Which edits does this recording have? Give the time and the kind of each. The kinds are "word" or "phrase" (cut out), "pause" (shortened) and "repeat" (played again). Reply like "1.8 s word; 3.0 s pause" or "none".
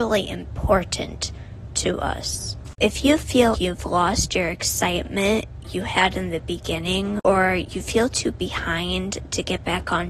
3.5 s word